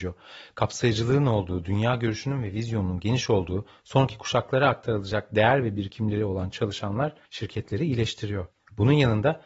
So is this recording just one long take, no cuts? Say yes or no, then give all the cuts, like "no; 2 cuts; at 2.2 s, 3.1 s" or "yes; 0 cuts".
no; 2 cuts; at 7.2 s, 8.5 s